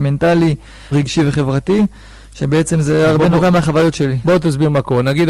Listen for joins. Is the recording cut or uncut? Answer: cut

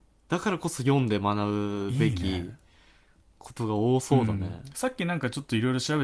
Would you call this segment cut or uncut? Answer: uncut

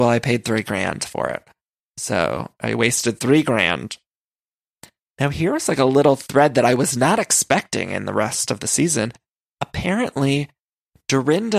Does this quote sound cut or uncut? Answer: uncut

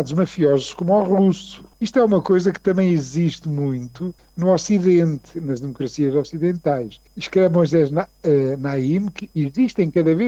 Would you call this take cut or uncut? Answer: cut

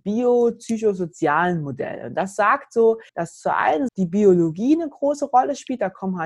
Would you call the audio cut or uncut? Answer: cut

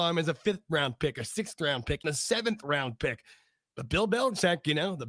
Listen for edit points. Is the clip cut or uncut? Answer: cut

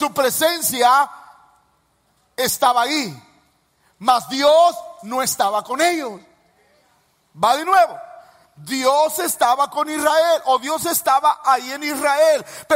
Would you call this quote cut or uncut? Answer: uncut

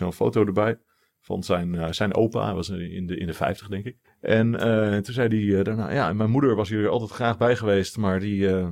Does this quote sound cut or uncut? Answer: cut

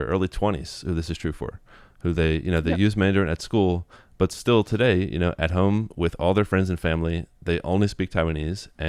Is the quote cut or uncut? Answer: uncut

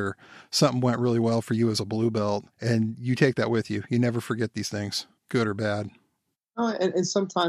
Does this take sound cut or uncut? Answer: cut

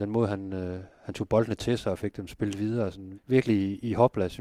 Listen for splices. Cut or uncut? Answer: cut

